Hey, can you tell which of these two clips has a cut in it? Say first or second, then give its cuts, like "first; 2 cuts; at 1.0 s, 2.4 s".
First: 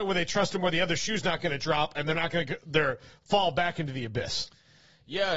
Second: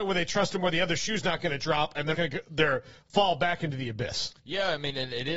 second; 2 cuts; at 2.1 s, 4.4 s